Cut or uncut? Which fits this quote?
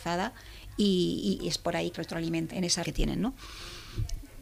cut